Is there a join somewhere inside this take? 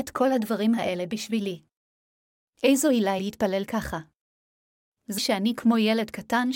yes; 2 cuts; at 3.2 s, 5.2 s

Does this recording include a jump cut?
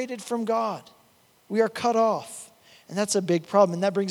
no; 0 cuts

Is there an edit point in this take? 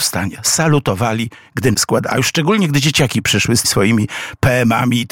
yes; 2 cuts; at 1.7 s, 3.6 s

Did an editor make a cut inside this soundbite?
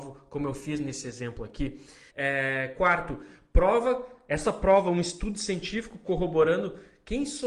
yes; 1 cut; at 2.1 s

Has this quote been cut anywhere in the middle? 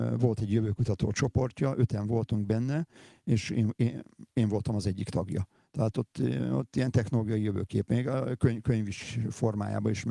no; 0 cuts

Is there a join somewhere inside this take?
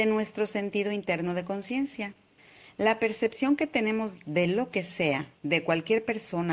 yes; 2 cuts; at 2.4 s, 5.4 s

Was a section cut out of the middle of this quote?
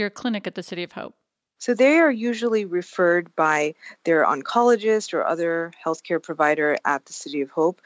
no; 0 cuts

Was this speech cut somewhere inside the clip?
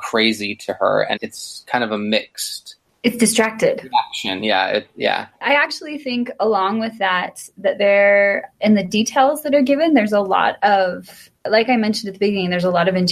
yes; 4 cuts; at 1.2 s, 2.8 s, 5.3 s, 11.4 s

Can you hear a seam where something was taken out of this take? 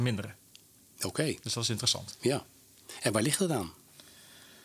no; 0 cuts

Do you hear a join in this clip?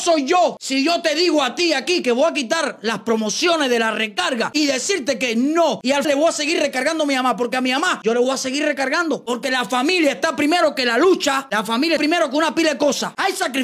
yes; 2 cuts; at 6.0 s, 12.0 s

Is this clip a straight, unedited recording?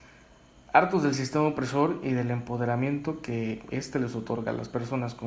yes; 0 cuts

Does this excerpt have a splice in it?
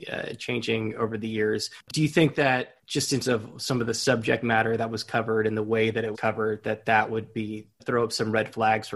yes; 4 cuts; at 2.8 s, 3.2 s, 6.1 s, 7.8 s

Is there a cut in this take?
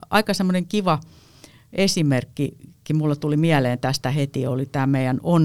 no; 0 cuts

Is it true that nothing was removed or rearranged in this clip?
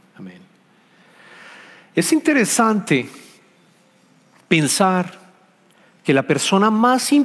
yes; 0 cuts

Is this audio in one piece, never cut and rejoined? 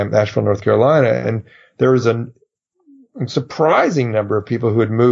yes; 0 cuts

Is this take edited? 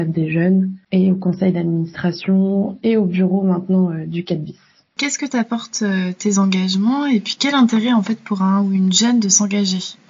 no; 0 cuts

